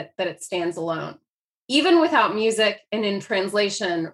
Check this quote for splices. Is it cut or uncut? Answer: cut